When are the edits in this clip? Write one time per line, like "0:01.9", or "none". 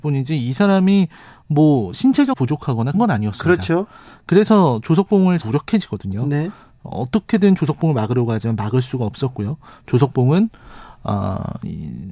0:02.3
0:02.9
0:05.4